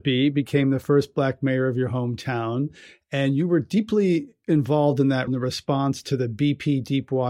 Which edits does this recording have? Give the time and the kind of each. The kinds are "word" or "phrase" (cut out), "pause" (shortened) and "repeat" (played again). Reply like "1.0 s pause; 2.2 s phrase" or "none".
5.3 s word